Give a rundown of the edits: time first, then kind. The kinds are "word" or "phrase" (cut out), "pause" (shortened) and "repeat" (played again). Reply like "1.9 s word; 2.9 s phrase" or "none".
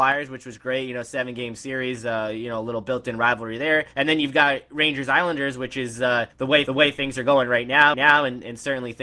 3.9 s pause; 6.3 s pause; 6.7 s repeat; 7.9 s repeat

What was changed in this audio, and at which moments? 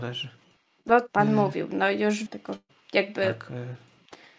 1.1 s word; 2.3 s word; 2.7 s pause

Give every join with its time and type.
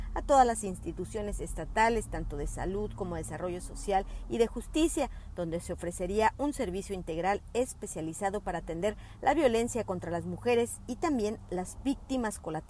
none

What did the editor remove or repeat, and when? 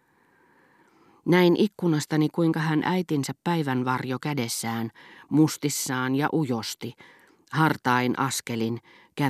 none

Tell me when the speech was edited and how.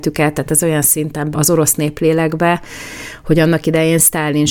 1.3 s word

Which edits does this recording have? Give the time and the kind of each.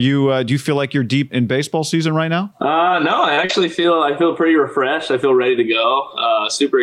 1.3 s word

